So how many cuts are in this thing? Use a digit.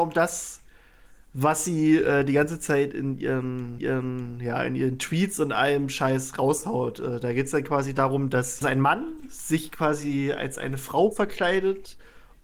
2